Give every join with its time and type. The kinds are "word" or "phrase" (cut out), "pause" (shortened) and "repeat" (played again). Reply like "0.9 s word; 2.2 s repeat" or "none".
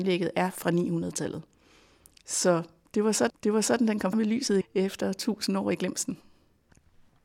3.3 s repeat; 4.1 s word; 4.6 s word